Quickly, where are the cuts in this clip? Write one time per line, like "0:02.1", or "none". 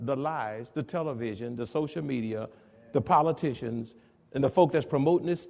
none